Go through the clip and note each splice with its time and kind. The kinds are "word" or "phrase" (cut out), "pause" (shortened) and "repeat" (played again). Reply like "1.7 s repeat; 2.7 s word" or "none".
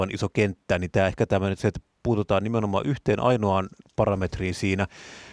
none